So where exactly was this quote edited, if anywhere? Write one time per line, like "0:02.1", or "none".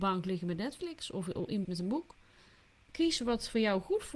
0:01.6
0:02.9